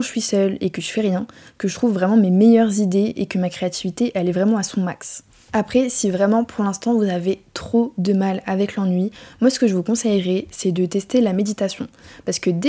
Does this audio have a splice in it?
no; 0 cuts

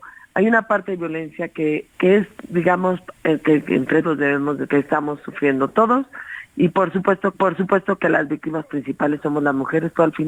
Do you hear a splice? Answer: yes; 5 cuts; at 1.9 s, 3.1 s, 4.0 s, 4.7 s, 7.3 s

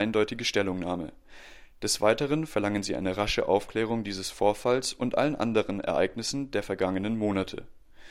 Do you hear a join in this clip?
no; 0 cuts

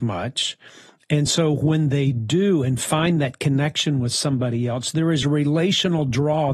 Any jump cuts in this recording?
no; 0 cuts

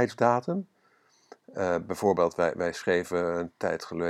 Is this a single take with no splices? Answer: yes; 0 cuts

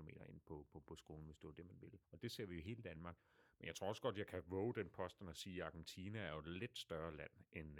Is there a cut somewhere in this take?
yes; 1 cut; at 2.0 s

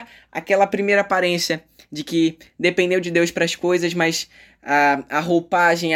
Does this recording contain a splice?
no; 0 cuts

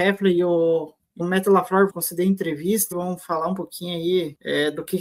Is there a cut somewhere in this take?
yes; 3 cuts; at 1.2 s, 1.9 s, 2.9 s

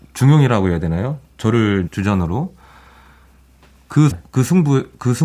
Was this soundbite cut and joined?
yes; 2 cuts; at 1.9 s, 4.1 s

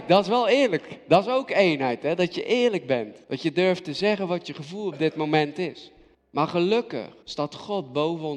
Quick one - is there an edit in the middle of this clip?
yes; 3 cuts; at 3.2 s, 6.1 s, 7.2 s

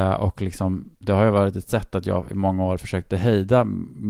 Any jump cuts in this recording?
yes; 1 cut; at 1.0 s

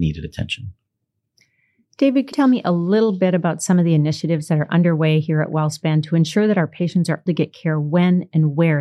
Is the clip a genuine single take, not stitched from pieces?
no; 2 cuts; at 2.3 s, 7.3 s

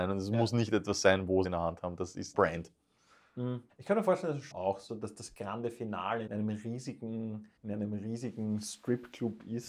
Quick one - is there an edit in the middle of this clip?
yes; 7 cuts; at 1.4 s, 2.3 s, 3.7 s, 4.5 s, 4.9 s, 6.3 s, 7.6 s

